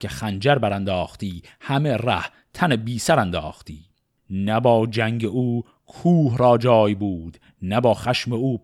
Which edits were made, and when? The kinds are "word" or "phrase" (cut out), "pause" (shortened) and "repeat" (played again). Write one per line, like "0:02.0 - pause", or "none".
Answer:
none